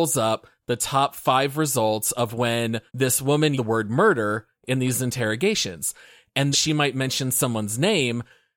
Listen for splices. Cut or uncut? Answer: cut